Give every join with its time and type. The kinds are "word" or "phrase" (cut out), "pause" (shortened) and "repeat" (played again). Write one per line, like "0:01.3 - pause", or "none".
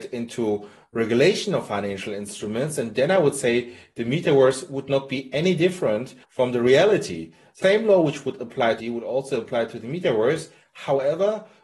0:06.2 - pause
0:07.6 - word
0:08.8 - phrase